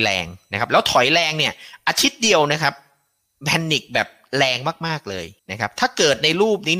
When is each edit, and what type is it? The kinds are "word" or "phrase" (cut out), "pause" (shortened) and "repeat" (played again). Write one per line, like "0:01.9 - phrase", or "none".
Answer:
0:05.4 - pause